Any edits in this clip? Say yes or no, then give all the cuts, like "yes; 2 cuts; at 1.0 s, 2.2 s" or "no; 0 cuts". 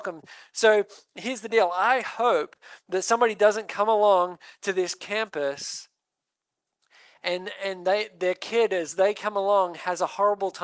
no; 0 cuts